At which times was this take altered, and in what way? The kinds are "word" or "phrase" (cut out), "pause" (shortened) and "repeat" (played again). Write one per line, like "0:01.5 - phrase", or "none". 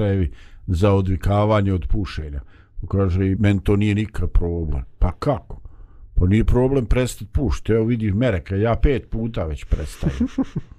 0:03.4 - word

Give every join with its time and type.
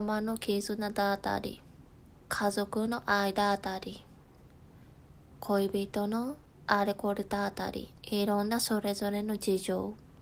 0:01.9 - pause
0:08.0 - pause

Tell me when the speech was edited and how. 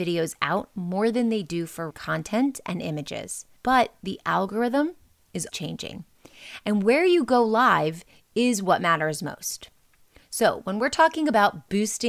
0:01.9 - word
0:03.6 - pause
0:05.5 - word

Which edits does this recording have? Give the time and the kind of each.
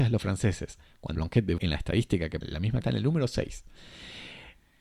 0:01.1 - word
0:01.6 - word
0:02.4 - word
0:02.8 - word

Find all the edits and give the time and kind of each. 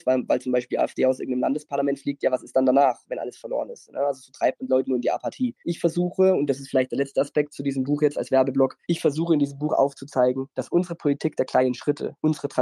0:05.6 - pause
0:08.8 - pause

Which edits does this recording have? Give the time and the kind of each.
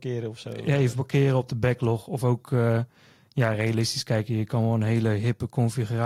none

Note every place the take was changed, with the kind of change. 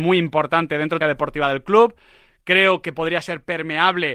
0:01.0 - phrase

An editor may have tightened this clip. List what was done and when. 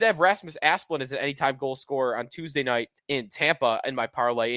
0:03.0 - pause

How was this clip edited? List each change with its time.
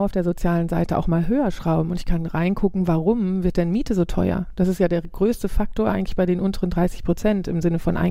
none

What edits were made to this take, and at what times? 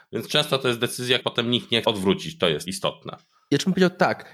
0:01.2 - word
0:01.8 - word
0:02.6 - word

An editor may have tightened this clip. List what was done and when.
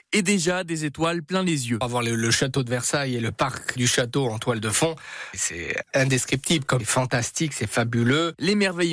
0:03.8 - word
0:05.8 - word
0:06.8 - phrase

